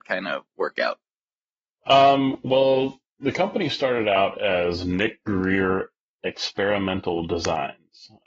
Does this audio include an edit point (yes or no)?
no